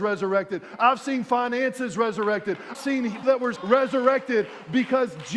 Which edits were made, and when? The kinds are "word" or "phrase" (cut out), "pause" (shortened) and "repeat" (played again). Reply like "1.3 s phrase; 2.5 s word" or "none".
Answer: 2.7 s word; 3.2 s word; 3.6 s word